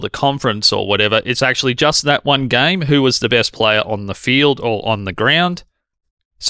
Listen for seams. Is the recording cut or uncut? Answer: uncut